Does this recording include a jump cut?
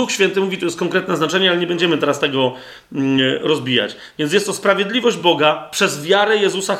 no; 0 cuts

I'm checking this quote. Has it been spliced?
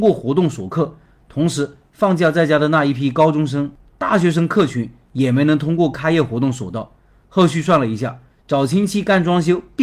no; 0 cuts

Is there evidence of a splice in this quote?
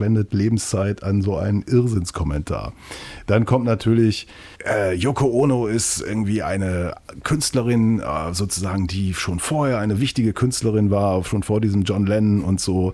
yes; 1 cut; at 4.5 s

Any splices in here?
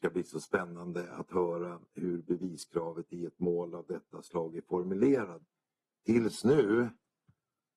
no; 0 cuts

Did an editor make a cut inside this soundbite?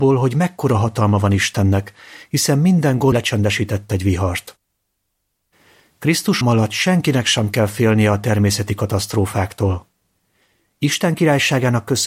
yes; 2 cuts; at 3.1 s, 6.4 s

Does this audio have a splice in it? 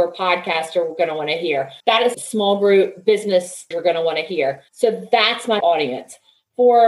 yes; 5 cuts; at 1.8 s, 2.1 s, 3.7 s, 4.7 s, 5.6 s

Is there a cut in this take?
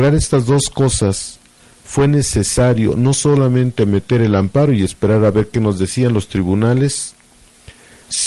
no; 0 cuts

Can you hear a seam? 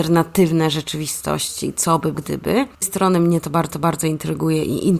yes; 3 cuts; at 2.1 s, 2.8 s, 3.7 s

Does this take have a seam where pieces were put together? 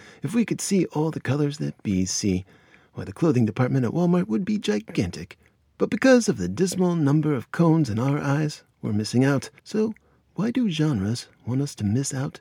yes; 1 cut; at 9.6 s

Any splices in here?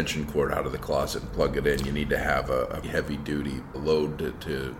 yes; 2 cuts; at 2.8 s, 3.7 s

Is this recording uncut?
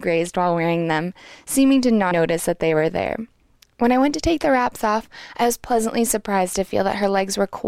no; 1 cut; at 2.1 s

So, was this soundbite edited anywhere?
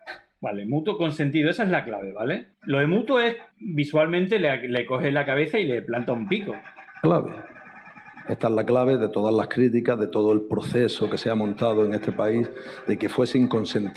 yes; 2 cuts; at 2.5 s, 3.5 s

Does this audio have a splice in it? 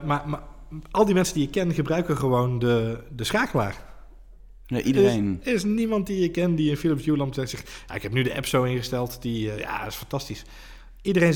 no; 0 cuts

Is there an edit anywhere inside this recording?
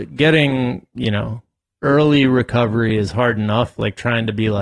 no; 0 cuts

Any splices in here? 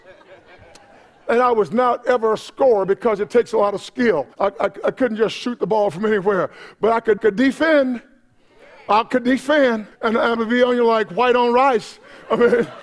yes; 4 cuts; at 4.3 s, 7.2 s, 9.9 s, 10.4 s

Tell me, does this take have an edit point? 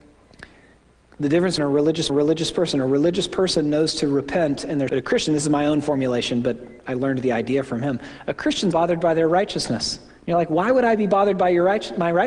yes; 4 cuts; at 1.6 s, 2.1 s, 4.9 s, 8.7 s

